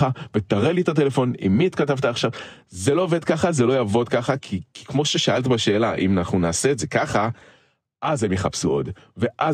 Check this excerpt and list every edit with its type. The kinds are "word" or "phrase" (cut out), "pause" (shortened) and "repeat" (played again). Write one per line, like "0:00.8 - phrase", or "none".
none